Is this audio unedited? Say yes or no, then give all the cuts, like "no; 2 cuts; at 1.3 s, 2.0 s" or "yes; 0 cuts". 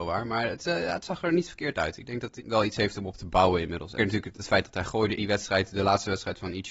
no; 4 cuts; at 2.4 s, 4.0 s, 4.3 s, 5.2 s